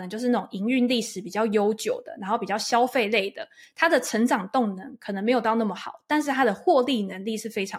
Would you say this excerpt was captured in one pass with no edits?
yes; 0 cuts

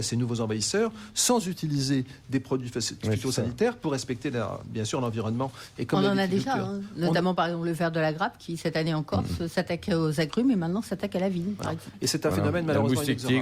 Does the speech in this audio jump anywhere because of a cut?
no; 0 cuts

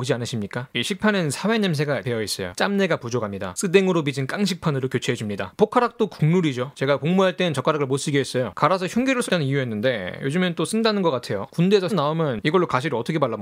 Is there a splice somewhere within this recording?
yes; 3 cuts; at 2.0 s, 9.3 s, 11.9 s

